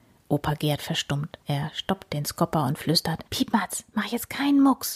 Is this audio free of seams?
no; 2 cuts; at 1.4 s, 3.3 s

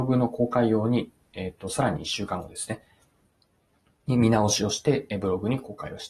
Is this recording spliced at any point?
no; 0 cuts

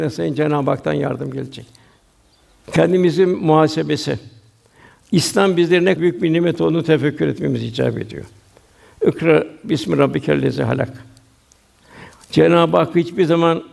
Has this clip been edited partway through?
yes; 1 cut; at 6.0 s

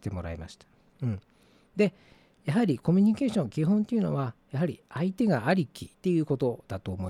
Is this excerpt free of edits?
no; 1 cut; at 5.9 s

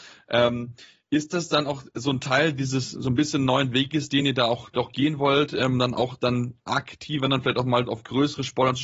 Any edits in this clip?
no; 0 cuts

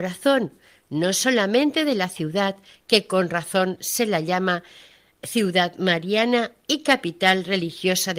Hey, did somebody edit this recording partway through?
no; 0 cuts

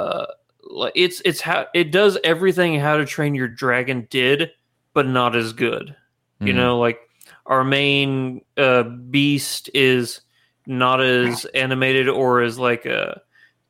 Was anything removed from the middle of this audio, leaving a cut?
no; 0 cuts

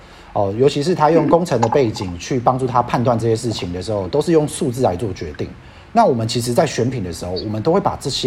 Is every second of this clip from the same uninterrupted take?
yes; 0 cuts

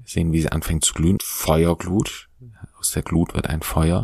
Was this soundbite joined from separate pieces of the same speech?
yes; 1 cut; at 1.2 s

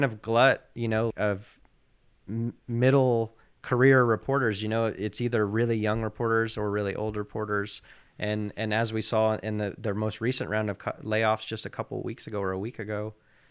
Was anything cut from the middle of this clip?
yes; 1 cut; at 1.1 s

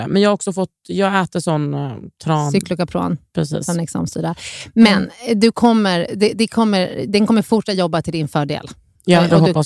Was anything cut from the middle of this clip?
no; 0 cuts

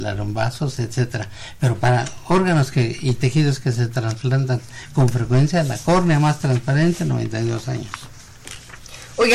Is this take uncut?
yes; 0 cuts

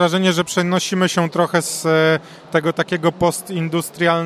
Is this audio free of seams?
yes; 0 cuts

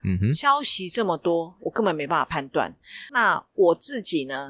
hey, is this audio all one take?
yes; 0 cuts

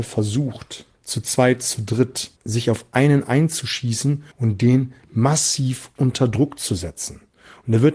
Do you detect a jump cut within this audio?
yes; 3 cuts; at 0.9 s, 2.4 s, 4.3 s

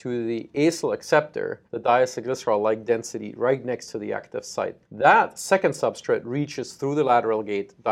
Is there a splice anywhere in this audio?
yes; 2 cuts; at 1.7 s, 4.8 s

